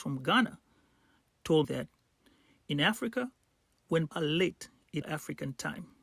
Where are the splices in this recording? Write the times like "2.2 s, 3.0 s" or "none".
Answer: 1.6 s, 4.1 s, 5.0 s